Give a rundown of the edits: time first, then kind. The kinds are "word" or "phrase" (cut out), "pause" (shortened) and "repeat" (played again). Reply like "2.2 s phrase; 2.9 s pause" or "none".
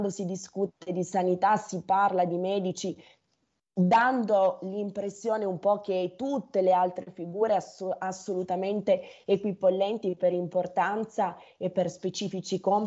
none